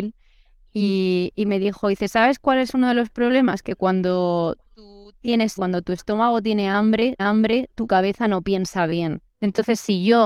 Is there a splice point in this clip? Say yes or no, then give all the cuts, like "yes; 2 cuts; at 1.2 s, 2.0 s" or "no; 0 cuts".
yes; 4 cuts; at 4.6 s, 5.6 s, 7.2 s, 9.3 s